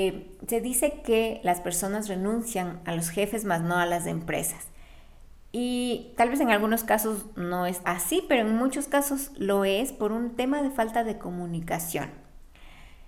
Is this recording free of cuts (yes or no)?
no